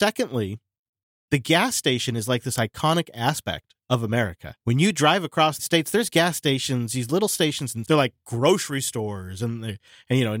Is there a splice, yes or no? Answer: yes